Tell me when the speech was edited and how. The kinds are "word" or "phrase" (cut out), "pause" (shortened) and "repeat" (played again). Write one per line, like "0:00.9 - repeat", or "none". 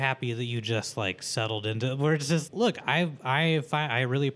0:02.5 - word